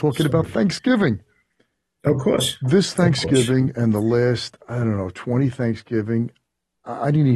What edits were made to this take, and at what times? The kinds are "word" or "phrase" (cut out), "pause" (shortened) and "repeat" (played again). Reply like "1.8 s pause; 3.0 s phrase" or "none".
none